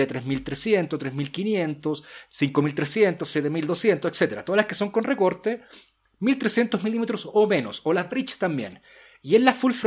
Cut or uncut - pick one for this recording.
uncut